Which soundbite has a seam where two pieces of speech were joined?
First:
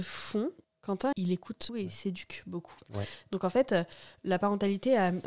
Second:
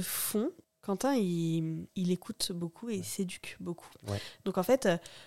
first; 2 cuts; at 1.1 s, 1.7 s

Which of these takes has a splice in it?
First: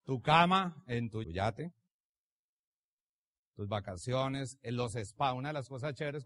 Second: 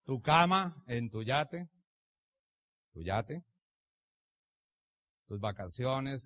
first; 1 cut; at 1.2 s

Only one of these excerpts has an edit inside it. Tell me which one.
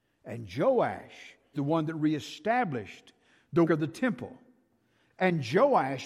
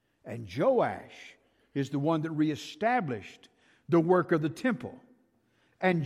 first; 2 cuts; at 1.5 s, 3.7 s

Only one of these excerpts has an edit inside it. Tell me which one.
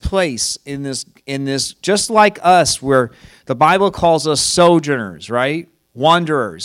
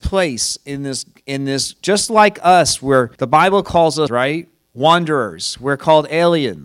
second; 2 cuts; at 3.2 s, 4.1 s

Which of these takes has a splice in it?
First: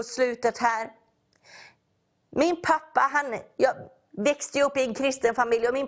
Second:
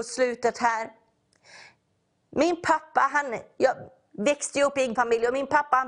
second; 1 cut; at 5.0 s

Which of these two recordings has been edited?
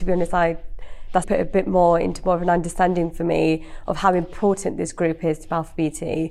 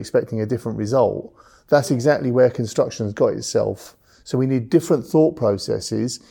first; 1 cut; at 1.2 s

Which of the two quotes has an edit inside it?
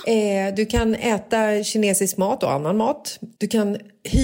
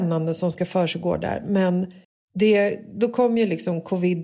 second; 1 cut; at 2.0 s

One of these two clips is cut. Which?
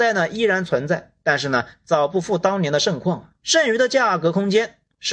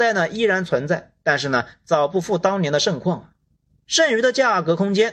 first; 1 cut; at 3.4 s

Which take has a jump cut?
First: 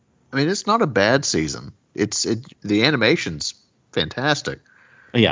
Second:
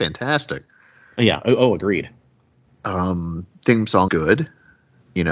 second; 1 cut; at 4.1 s

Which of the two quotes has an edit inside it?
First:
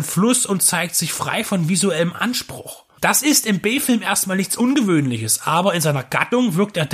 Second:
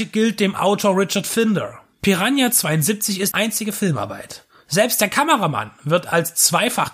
second; 1 cut; at 3.3 s

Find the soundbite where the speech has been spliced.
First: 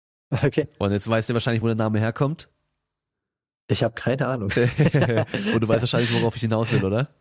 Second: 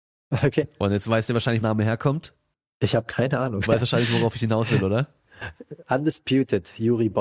second; 3 cuts; at 1.6 s, 2.5 s, 3.7 s

